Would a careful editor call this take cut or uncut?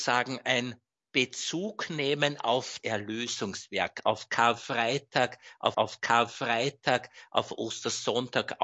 cut